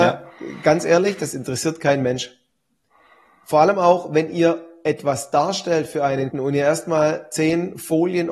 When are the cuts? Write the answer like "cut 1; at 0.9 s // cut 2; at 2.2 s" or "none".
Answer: cut 1; at 6.3 s